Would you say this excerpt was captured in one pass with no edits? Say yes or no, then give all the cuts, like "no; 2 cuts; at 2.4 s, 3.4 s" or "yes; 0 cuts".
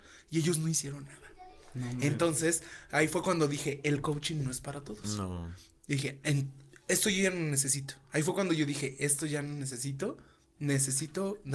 yes; 0 cuts